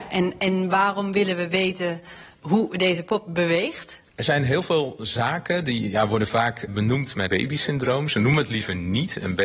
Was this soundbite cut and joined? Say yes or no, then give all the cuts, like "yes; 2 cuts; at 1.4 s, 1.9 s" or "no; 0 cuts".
yes; 2 cuts; at 6.7 s, 7.3 s